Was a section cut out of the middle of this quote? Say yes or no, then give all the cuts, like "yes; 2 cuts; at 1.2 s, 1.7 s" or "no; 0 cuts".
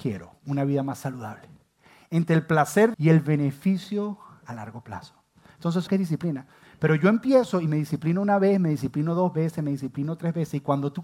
yes; 2 cuts; at 2.9 s, 5.9 s